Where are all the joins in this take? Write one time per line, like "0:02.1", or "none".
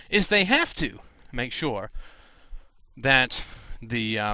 none